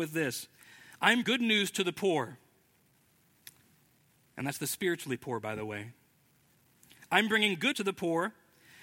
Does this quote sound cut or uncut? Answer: cut